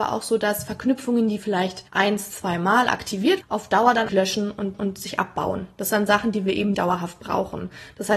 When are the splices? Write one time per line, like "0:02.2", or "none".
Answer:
0:01.9
0:03.4
0:04.1
0:04.7
0:05.9
0:06.7